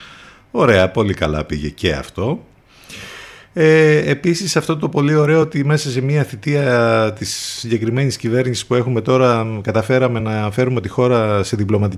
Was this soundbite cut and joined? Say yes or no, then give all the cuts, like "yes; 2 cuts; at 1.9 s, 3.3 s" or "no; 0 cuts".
no; 0 cuts